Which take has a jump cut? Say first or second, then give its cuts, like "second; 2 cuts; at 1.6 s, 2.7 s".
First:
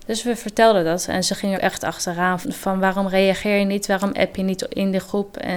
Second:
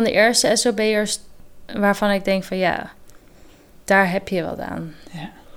first; 2 cuts; at 1.5 s, 2.4 s